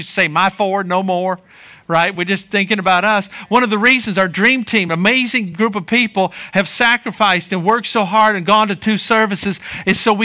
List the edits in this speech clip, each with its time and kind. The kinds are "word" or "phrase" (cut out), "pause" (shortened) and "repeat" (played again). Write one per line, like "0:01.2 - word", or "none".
none